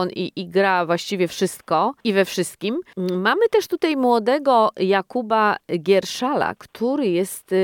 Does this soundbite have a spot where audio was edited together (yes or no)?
no